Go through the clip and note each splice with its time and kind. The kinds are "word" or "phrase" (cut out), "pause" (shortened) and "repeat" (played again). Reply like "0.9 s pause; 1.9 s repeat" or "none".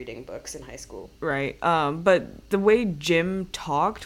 1.2 s pause